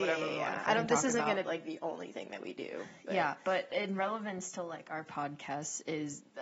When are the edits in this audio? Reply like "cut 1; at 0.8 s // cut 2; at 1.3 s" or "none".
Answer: cut 1; at 1.5 s